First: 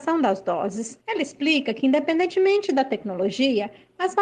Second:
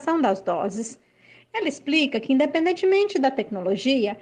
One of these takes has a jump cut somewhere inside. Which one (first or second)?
first